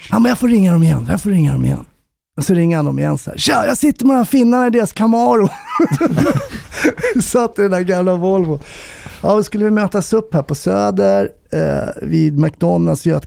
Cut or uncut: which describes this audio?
uncut